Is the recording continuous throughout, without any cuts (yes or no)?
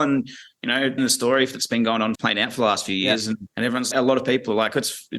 no